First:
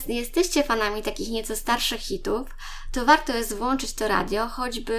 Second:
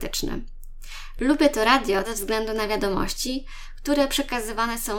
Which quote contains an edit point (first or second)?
second